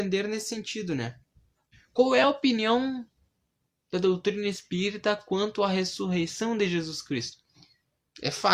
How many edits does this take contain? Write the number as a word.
zero